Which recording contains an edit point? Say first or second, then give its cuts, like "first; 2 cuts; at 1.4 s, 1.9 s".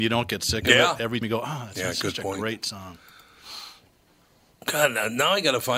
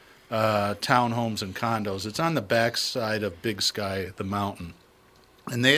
first; 1 cut; at 1.2 s